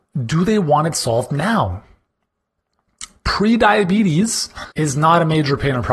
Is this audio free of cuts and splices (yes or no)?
no